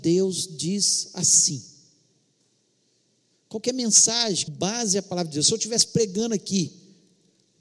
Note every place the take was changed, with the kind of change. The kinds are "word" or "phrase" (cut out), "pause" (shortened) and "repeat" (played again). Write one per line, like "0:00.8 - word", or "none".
0:04.5 - phrase